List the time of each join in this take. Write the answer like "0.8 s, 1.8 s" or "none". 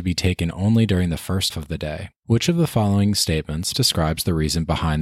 1.5 s, 2.2 s, 3.7 s